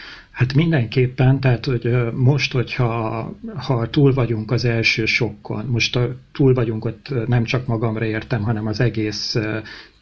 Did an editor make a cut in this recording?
no; 0 cuts

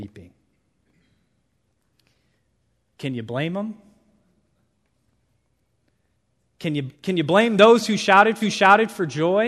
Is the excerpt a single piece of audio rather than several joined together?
no; 2 cuts; at 6.9 s, 8.4 s

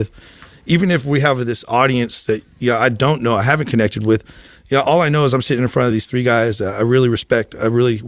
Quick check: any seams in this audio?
no; 0 cuts

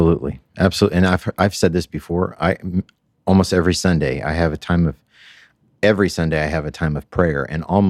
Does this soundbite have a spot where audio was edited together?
no; 0 cuts

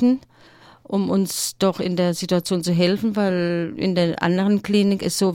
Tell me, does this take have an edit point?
no; 0 cuts

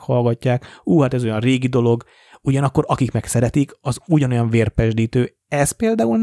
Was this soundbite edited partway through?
no; 0 cuts

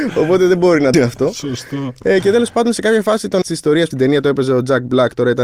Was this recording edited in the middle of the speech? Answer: yes; 3 cuts; at 0.9 s, 3.4 s, 3.9 s

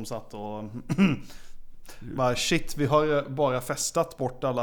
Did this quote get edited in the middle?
no; 0 cuts

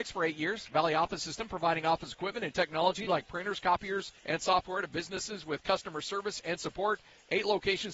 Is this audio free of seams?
no; 1 cut; at 4.2 s

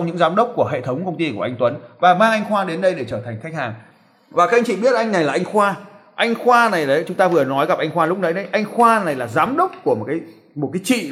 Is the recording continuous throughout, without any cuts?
yes; 0 cuts

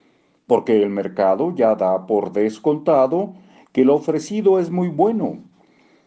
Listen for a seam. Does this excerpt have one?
no; 0 cuts

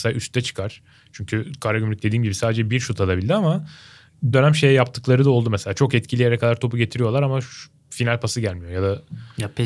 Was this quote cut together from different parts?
yes; 1 cut; at 4.3 s

